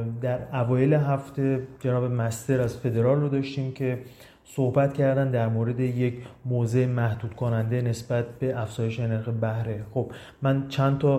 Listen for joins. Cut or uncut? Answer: uncut